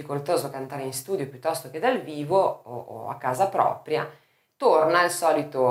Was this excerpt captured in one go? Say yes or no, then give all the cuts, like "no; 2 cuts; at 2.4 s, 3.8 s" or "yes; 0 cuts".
yes; 0 cuts